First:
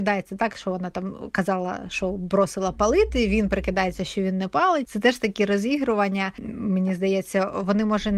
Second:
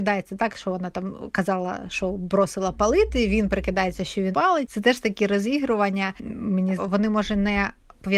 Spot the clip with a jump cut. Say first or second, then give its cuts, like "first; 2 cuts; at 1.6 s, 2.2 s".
second; 2 cuts; at 4.3 s, 6.8 s